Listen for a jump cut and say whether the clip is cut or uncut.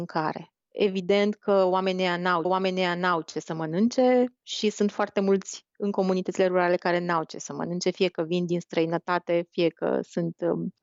cut